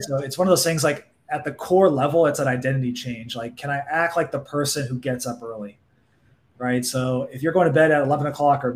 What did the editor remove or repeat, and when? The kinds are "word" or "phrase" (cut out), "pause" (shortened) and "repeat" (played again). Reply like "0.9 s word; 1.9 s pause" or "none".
none